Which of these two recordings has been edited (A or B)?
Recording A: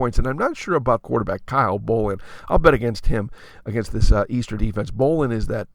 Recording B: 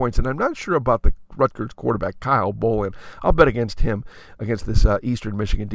A